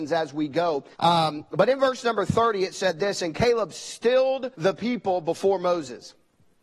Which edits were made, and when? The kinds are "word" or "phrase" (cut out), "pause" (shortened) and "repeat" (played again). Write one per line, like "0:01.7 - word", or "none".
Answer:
0:00.9 - pause
0:04.5 - pause